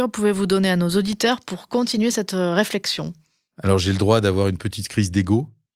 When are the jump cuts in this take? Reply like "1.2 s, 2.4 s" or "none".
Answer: none

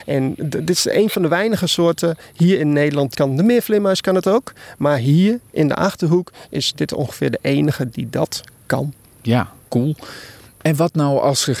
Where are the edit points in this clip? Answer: 3.1 s, 9.7 s

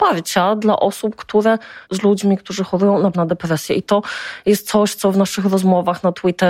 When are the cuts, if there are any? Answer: 1.8 s, 3.1 s

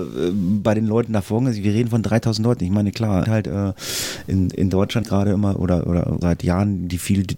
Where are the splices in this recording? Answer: 3.2 s, 5.0 s, 6.2 s

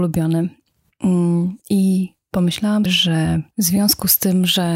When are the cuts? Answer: 1.6 s, 2.9 s, 3.5 s

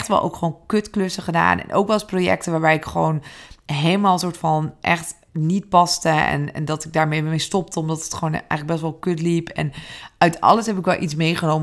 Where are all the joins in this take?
5.3 s

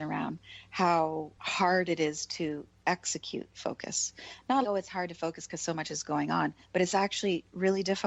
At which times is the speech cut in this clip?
4.6 s, 6.6 s

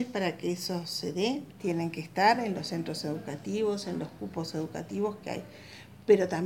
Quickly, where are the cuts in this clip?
none

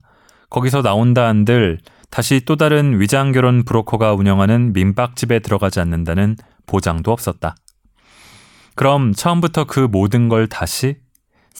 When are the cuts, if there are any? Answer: none

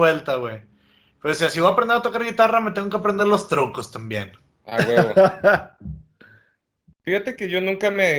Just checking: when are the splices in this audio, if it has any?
none

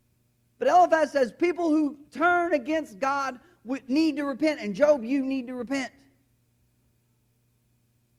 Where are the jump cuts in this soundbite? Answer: 2.1 s

